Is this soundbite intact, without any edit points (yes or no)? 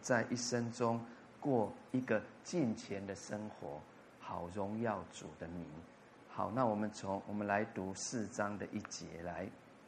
yes